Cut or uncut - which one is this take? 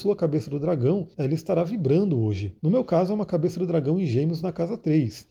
cut